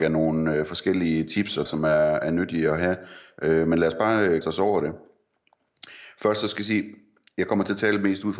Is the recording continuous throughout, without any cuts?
no; 2 cuts; at 1.7 s, 4.4 s

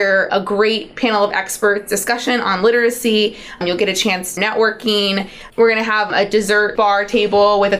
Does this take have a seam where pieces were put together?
yes; 3 cuts; at 4.4 s, 5.5 s, 6.7 s

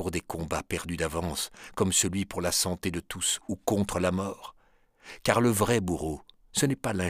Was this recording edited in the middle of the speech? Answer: no; 0 cuts

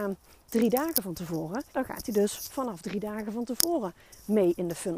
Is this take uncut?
no; 1 cut; at 1.7 s

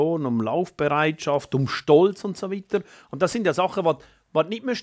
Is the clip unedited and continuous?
yes; 0 cuts

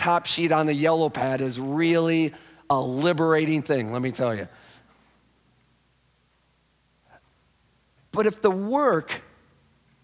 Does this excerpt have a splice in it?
no; 0 cuts

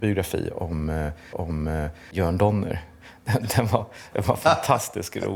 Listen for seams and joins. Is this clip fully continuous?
no; 1 cut; at 1.3 s

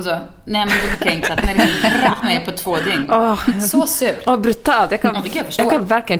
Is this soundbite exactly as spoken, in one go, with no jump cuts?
no; 3 cuts; at 0.9 s, 1.4 s, 2.2 s

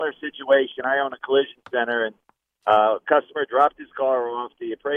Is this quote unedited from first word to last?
yes; 0 cuts

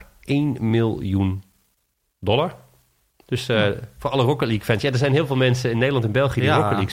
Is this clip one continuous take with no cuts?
yes; 0 cuts

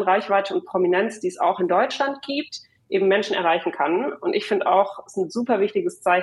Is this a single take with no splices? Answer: yes; 0 cuts

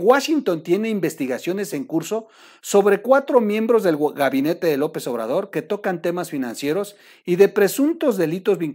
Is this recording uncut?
yes; 0 cuts

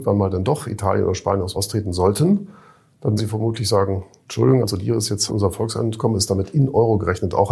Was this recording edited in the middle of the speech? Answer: yes; 4 cuts; at 1.5 s, 3.2 s, 4.6 s, 5.3 s

